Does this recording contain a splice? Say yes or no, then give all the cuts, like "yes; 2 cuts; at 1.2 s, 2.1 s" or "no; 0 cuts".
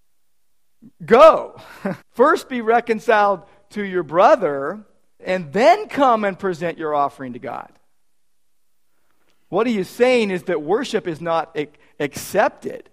yes; 2 cuts; at 2.0 s, 5.2 s